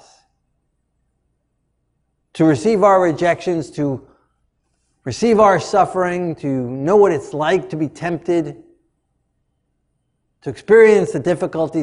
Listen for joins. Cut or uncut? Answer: uncut